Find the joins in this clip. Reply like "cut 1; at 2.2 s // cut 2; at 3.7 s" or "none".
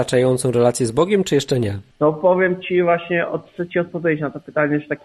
cut 1; at 1.9 s